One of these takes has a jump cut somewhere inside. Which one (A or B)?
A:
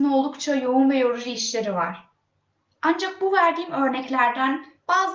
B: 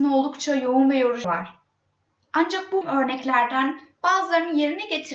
B